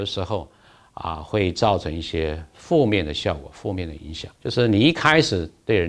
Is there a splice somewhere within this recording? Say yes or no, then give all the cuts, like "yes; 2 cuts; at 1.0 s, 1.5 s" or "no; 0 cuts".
yes; 1 cut; at 4.4 s